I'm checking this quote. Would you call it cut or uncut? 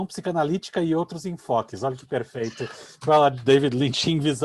uncut